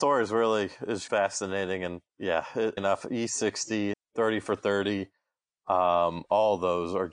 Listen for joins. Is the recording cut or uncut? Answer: cut